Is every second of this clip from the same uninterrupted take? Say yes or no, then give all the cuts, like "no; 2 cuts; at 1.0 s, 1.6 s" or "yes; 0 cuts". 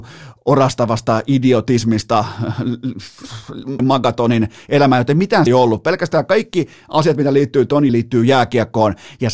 no; 3 cuts; at 3.8 s, 5.5 s, 7.9 s